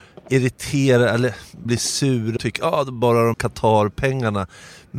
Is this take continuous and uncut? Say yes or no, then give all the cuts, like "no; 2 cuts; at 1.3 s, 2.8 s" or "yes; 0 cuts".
no; 3 cuts; at 1.7 s, 2.4 s, 3.3 s